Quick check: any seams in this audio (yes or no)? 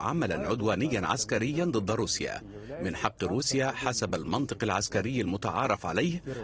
no